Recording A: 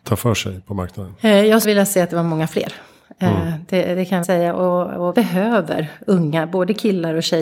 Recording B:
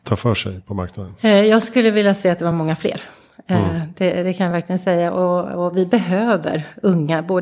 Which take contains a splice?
A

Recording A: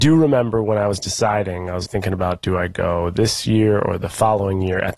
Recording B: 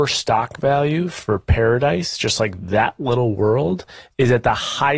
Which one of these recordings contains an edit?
A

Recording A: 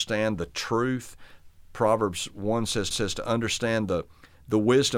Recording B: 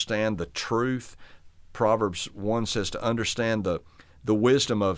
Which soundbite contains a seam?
A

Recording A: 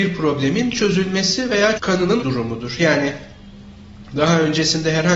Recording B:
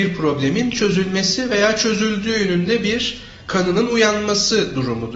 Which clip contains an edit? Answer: A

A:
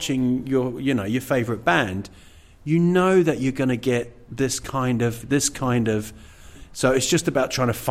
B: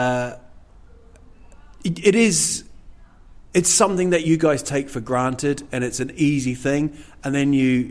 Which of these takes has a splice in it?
A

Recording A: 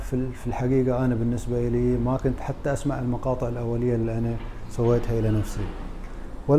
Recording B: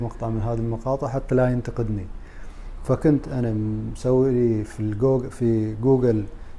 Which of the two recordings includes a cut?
A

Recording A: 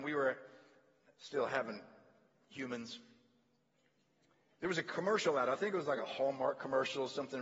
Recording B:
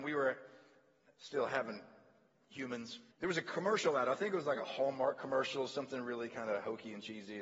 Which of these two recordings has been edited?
B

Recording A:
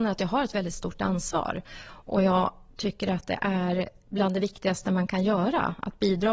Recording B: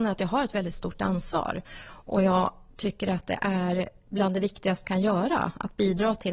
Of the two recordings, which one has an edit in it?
B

